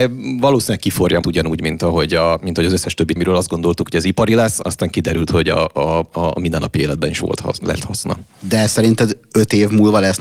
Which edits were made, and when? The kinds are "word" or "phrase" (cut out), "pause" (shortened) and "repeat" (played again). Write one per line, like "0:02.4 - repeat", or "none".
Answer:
0:01.2 - word
0:03.2 - word
0:04.6 - word